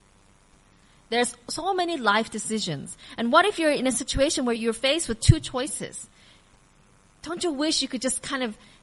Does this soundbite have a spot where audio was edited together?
no; 0 cuts

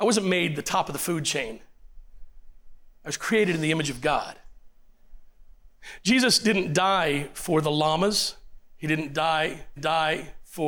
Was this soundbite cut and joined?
yes; 2 cuts; at 3.0 s, 9.8 s

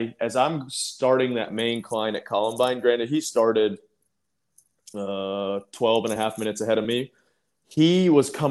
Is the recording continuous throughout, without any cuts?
yes; 0 cuts

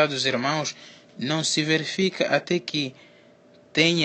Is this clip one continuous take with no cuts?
yes; 0 cuts

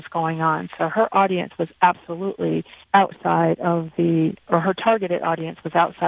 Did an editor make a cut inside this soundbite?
yes; 1 cut; at 2.8 s

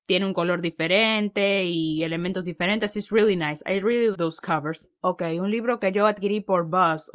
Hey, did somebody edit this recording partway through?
yes; 2 cuts; at 4.1 s, 4.9 s

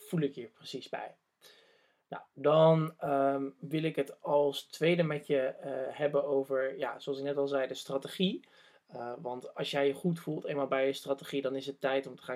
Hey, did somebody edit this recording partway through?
no; 0 cuts

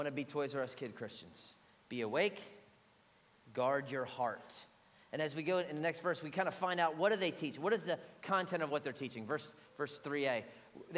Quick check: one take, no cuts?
yes; 0 cuts

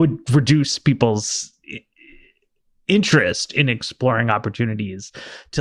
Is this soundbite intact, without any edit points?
yes; 0 cuts

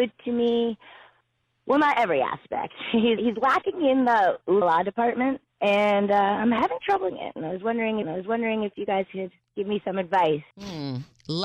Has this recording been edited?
yes; 6 cuts; at 3.2 s, 4.6 s, 5.5 s, 7.1 s, 8.0 s, 10.5 s

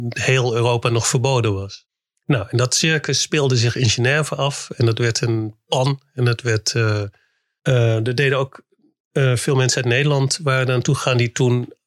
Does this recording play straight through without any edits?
yes; 0 cuts

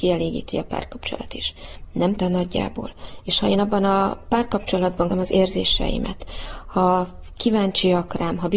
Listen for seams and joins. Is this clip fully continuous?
no; 2 cuts; at 2.2 s, 5.1 s

